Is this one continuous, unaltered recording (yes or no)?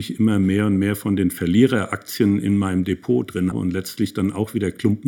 no